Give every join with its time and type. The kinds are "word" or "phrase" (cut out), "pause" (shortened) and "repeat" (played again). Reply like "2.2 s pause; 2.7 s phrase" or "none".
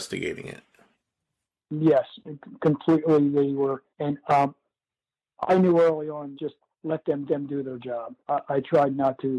3.9 s pause; 6.3 s word; 7.3 s repeat; 8.2 s pause